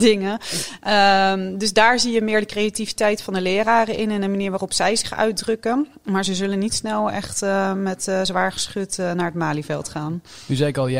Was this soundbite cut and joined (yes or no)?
no